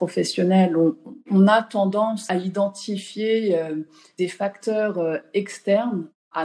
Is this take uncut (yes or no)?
yes